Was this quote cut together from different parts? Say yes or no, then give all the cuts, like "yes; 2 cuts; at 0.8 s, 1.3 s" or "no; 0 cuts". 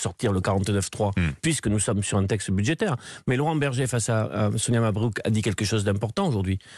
no; 0 cuts